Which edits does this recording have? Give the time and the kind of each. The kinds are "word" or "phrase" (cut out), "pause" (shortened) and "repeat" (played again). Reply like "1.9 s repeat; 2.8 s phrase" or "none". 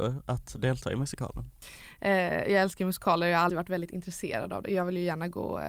3.5 s phrase